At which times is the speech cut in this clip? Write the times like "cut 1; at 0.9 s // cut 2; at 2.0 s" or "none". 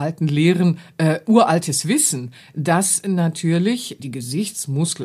cut 1; at 4.0 s